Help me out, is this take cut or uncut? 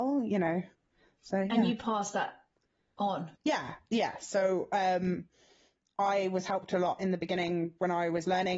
cut